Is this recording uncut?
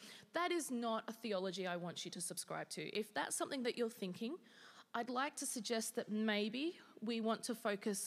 yes; 0 cuts

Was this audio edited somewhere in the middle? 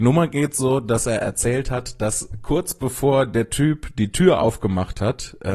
no; 0 cuts

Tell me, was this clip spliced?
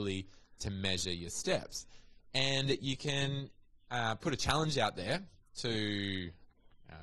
no; 0 cuts

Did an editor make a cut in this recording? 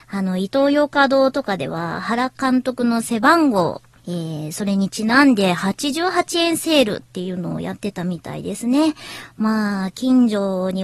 yes; 1 cut; at 4.0 s

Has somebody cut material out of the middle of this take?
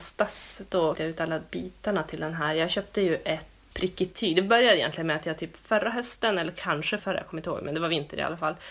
yes; 3 cuts; at 0.9 s, 3.7 s, 7.0 s

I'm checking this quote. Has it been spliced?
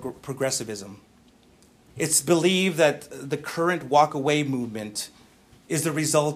no; 0 cuts

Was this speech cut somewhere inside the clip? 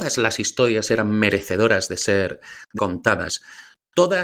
yes; 1 cut; at 2.8 s

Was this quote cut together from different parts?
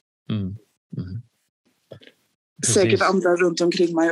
no; 0 cuts

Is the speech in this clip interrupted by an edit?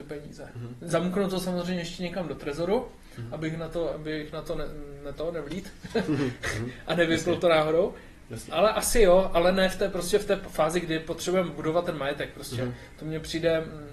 yes; 1 cut; at 3.9 s

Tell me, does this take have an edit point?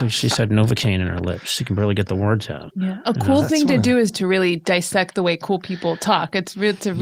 no; 0 cuts

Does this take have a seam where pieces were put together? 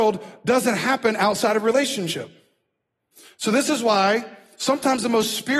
no; 0 cuts

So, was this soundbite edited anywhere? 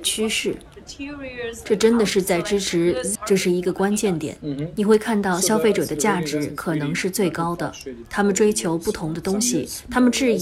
yes; 1 cut; at 3.1 s

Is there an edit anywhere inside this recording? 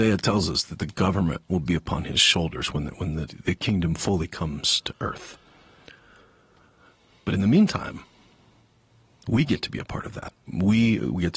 no; 0 cuts

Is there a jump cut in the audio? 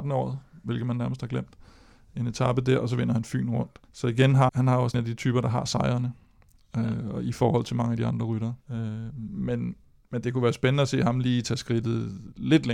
yes; 4 cuts; at 3.8 s, 4.5 s, 4.9 s, 8.6 s

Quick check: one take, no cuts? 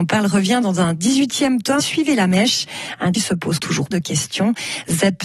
no; 4 cuts; at 1.8 s, 3.1 s, 3.6 s, 3.9 s

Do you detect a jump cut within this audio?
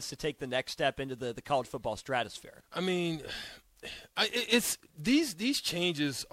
yes; 3 cuts; at 2.7 s, 4.1 s, 4.9 s

